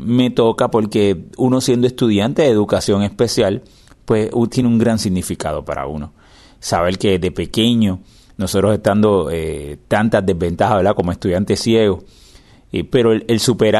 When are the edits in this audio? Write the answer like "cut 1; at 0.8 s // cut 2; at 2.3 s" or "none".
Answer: none